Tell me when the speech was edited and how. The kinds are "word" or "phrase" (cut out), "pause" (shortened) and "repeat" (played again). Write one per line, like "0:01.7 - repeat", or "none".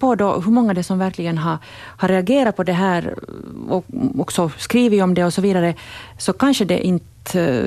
none